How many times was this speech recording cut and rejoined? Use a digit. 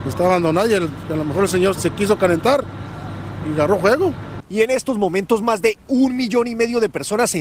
1